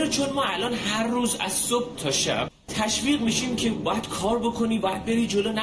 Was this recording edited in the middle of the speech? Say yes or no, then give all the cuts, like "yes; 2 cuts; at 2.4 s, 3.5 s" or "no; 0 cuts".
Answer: no; 0 cuts